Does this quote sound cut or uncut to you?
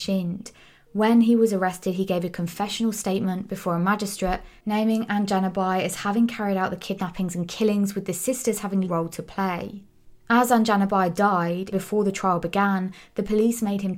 cut